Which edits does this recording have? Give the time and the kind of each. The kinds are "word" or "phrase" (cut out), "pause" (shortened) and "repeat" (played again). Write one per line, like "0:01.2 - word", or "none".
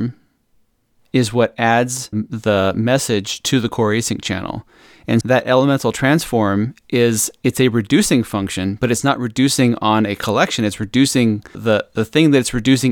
0:02.1 - word
0:05.2 - word
0:11.5 - word